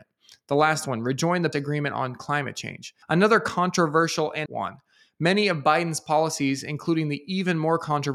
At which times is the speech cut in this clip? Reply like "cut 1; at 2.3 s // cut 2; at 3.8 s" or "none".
cut 1; at 1.5 s // cut 2; at 3.0 s // cut 3; at 4.5 s